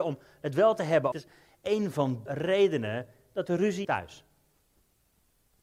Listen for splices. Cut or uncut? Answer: cut